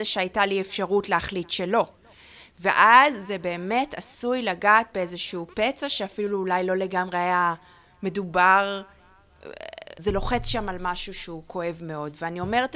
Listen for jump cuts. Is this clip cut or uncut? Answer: cut